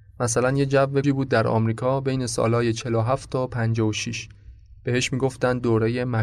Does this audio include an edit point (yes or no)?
yes